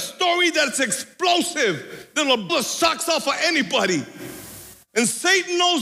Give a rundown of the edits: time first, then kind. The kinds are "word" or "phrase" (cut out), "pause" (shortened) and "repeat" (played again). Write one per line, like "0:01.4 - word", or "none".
0:02.5 - word

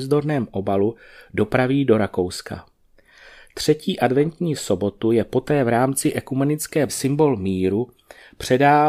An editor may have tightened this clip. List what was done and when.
0:06.9 - word

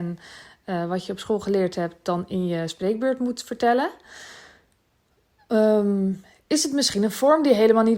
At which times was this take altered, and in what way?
none

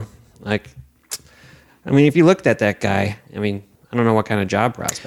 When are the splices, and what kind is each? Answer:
none

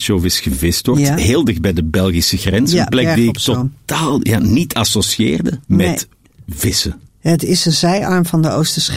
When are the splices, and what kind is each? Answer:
0:05.6 - pause
0:07.1 - pause

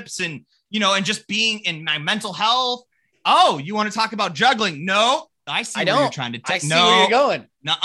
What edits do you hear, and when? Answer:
none

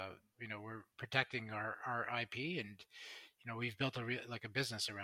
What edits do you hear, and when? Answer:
0:00.9 - pause

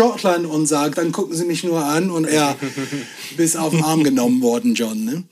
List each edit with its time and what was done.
0:00.9 - word
0:02.3 - word

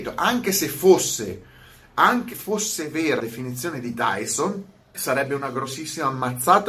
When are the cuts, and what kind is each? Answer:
0:02.3 - word
0:03.2 - word
0:04.9 - word

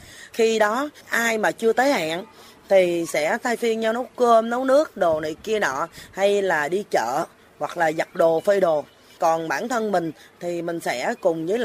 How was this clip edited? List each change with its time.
none

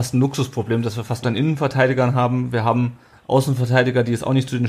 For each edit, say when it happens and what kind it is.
0:01.2 - phrase
0:03.1 - word

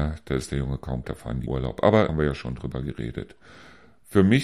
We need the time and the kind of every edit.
0:01.0 - word
0:01.5 - word
0:02.1 - word

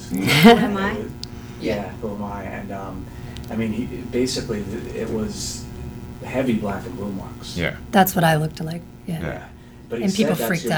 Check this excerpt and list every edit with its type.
none

